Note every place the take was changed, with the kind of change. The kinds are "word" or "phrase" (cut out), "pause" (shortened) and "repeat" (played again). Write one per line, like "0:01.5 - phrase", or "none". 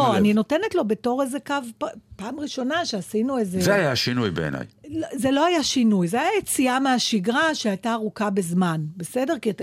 none